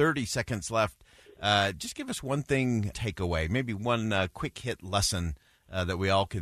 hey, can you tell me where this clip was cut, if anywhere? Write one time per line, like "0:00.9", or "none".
0:02.9